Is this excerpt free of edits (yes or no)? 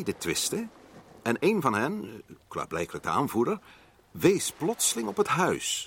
yes